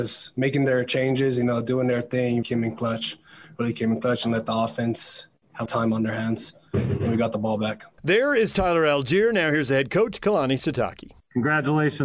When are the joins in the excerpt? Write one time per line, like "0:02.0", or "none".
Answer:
0:02.4
0:05.7